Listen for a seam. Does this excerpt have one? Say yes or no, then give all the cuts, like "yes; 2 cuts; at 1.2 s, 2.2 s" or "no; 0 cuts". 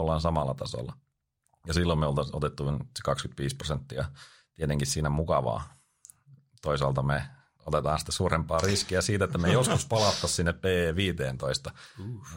no; 0 cuts